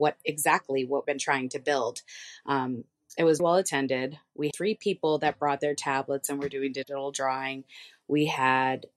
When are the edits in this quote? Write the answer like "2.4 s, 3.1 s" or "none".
1.0 s, 3.4 s, 4.5 s